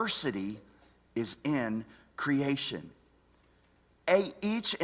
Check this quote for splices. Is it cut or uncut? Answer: uncut